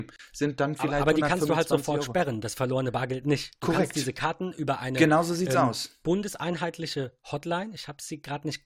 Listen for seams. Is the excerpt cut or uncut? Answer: uncut